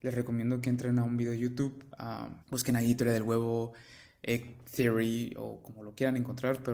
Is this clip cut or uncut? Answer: cut